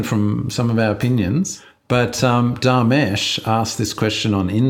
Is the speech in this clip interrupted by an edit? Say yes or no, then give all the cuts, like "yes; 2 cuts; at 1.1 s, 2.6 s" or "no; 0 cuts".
no; 0 cuts